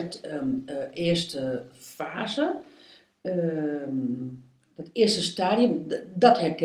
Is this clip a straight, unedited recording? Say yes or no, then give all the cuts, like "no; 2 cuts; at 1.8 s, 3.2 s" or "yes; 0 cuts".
yes; 0 cuts